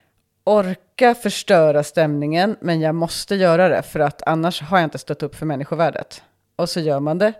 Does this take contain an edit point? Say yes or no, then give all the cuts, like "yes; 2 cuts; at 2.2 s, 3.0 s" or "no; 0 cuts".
no; 0 cuts